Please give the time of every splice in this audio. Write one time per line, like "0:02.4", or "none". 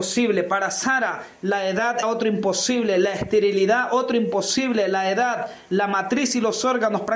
0:02.0